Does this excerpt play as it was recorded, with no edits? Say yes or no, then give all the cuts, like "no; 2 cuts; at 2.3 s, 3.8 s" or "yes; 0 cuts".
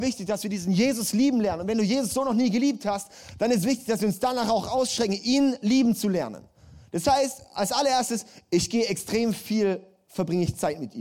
yes; 0 cuts